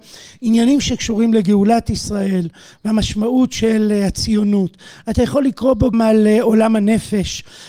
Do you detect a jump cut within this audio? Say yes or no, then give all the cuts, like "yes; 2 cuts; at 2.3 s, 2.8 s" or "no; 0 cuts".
yes; 1 cut; at 5.9 s